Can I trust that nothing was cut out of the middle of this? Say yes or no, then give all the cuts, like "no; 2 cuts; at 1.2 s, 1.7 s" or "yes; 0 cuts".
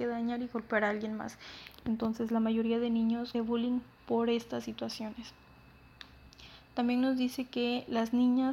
no; 1 cut; at 3.3 s